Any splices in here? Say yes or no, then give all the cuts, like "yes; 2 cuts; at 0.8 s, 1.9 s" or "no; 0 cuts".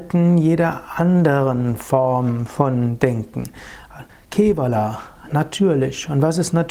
yes; 1 cut; at 4.1 s